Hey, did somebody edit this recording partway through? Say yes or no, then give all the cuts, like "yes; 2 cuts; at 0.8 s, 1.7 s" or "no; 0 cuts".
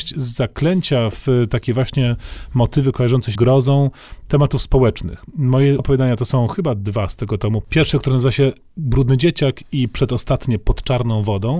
yes; 2 cuts; at 3.4 s, 5.8 s